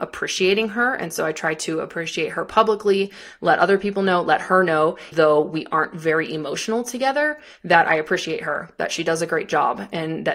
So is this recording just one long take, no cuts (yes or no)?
no